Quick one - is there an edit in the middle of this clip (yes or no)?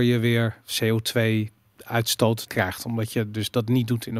yes